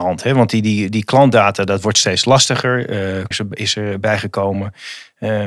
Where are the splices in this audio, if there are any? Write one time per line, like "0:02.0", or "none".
0:03.3

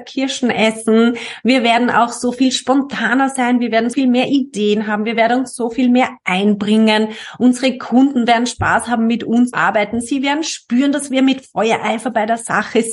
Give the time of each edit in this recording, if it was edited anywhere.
0:03.9
0:09.5

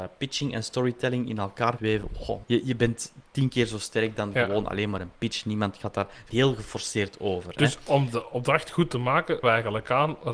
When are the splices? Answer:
0:01.8
0:02.4
0:06.3
0:09.4

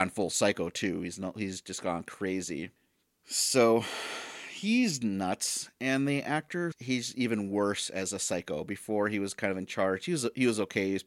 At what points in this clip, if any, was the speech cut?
0:06.7

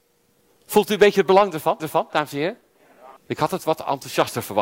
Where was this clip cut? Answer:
0:01.8
0:03.2

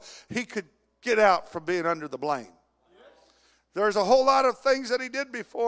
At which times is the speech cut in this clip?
none

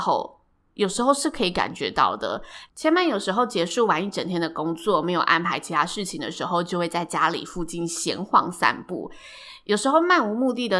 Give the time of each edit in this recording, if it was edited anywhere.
0:02.7

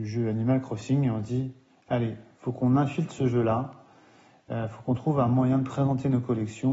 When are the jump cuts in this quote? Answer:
none

